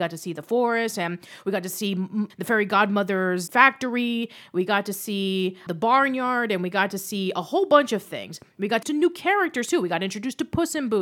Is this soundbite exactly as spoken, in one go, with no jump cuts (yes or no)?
no